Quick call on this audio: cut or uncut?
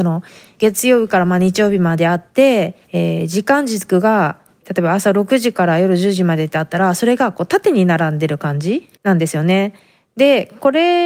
cut